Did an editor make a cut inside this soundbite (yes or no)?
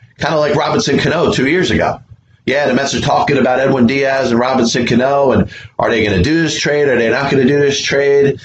no